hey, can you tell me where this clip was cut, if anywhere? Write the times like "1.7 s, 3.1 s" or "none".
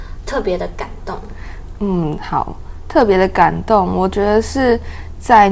none